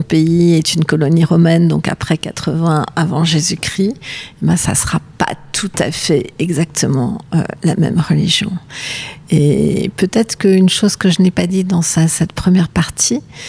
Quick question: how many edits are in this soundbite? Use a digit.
0